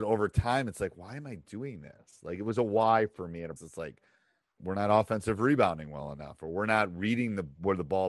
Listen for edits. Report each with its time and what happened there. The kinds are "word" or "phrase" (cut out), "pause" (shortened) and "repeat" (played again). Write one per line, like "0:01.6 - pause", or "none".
0:03.6 - word
0:04.6 - word

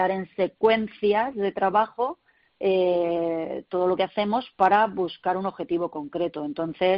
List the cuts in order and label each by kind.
none

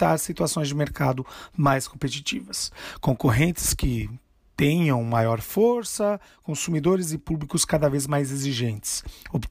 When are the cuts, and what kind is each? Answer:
none

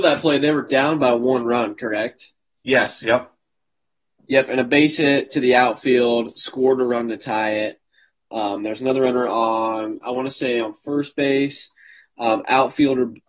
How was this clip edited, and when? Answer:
none

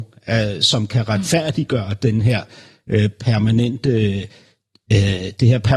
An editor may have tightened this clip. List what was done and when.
none

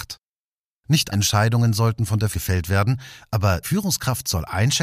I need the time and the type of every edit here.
0:01.1 - word
0:02.3 - word
0:03.6 - word

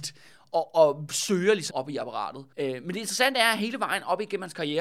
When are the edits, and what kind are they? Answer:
0:01.7 - word
0:02.5 - pause

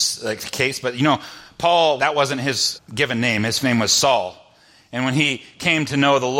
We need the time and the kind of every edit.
0:02.0 - word
0:02.8 - word
0:03.6 - word

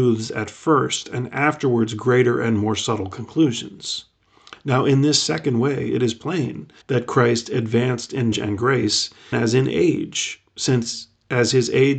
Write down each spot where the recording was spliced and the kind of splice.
0:06.8 - pause
0:08.3 - word
0:09.3 - word

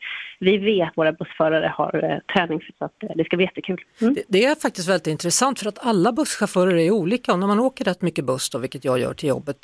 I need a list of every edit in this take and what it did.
0:00.9 - word
0:02.7 - word

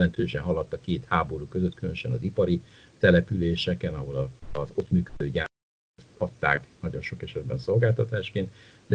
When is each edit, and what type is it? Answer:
none

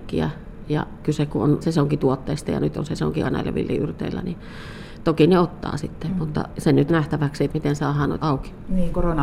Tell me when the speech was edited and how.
0:01.6 - word
0:03.2 - word
0:06.9 - word
0:07.5 - word
0:08.2 - word

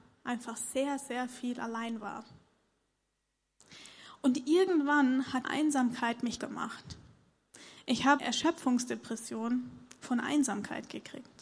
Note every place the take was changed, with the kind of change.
0:05.4 - word
0:06.4 - word
0:08.2 - word

